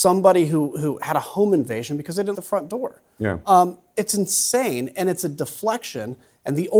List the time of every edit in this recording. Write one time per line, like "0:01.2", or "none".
0:02.3